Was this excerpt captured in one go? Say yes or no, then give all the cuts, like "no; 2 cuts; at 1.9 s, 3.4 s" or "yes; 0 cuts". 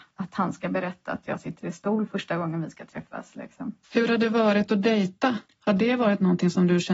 no; 1 cut; at 3.8 s